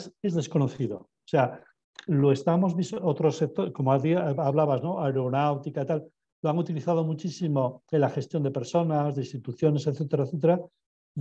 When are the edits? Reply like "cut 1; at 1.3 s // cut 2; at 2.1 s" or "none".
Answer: none